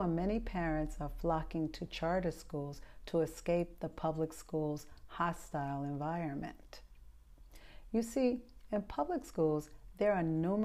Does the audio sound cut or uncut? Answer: uncut